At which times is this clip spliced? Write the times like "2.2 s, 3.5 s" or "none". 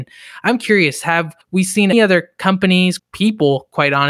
1.4 s, 1.9 s, 3.0 s